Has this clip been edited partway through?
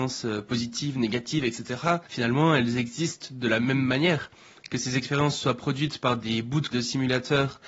yes; 2 cuts; at 2.0 s, 6.7 s

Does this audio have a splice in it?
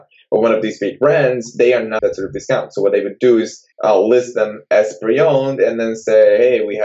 yes; 2 cuts; at 2.0 s, 3.7 s

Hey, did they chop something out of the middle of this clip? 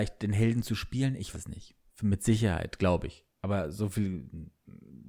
yes; 3 cuts; at 1.3 s, 1.9 s, 3.3 s

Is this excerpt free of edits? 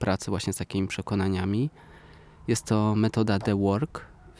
yes; 0 cuts

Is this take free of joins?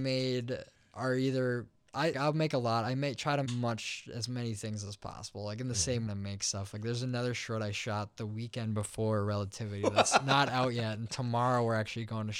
no; 3 cuts; at 2.1 s, 3.5 s, 6.1 s

